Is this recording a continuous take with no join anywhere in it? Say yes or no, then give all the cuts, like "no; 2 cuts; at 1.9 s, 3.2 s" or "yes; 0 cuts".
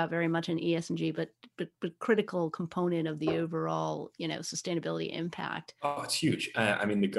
yes; 0 cuts